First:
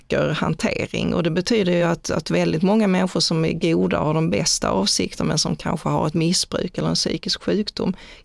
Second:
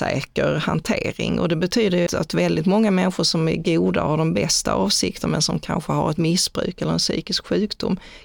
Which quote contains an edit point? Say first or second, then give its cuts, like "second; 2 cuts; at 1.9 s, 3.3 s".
second; 1 cut; at 2.1 s